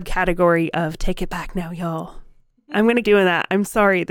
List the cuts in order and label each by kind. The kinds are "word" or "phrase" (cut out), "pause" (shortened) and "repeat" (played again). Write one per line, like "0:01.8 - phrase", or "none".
0:03.0 - word